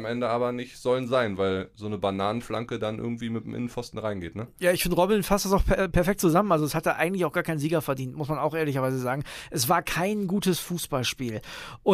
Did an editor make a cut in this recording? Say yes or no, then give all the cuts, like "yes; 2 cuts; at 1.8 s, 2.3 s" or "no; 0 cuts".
no; 0 cuts